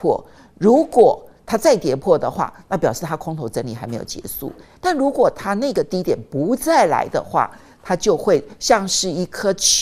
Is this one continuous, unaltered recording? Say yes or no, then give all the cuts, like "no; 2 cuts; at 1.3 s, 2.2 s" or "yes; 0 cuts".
yes; 0 cuts